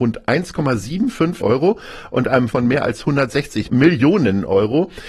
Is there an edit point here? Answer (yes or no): yes